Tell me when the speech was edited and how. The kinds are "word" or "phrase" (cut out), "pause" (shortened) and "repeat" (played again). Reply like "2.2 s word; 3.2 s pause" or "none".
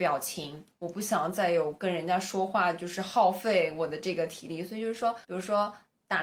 5.2 s pause